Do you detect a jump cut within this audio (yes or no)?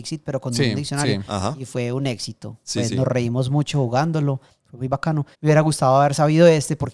yes